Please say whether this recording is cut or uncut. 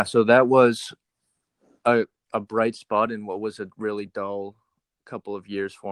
uncut